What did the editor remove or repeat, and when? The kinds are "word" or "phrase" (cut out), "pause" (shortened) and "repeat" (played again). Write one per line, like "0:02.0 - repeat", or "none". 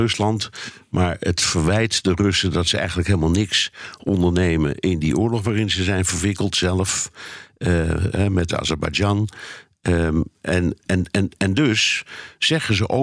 0:10.8 - word